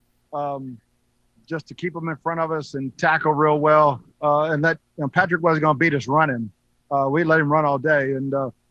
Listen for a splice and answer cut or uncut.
cut